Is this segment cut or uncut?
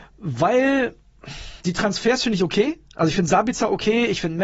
cut